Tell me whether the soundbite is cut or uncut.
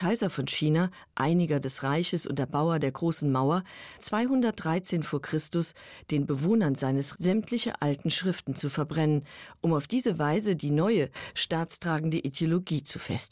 cut